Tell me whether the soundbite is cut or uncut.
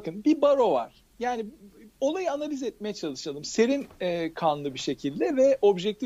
uncut